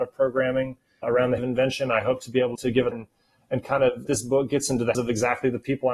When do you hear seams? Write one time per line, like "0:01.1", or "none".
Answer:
0:01.0
0:01.4
0:02.5
0:02.9
0:04.1
0:04.9